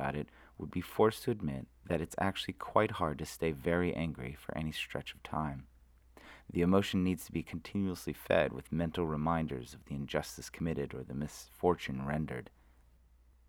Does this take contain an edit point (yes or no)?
no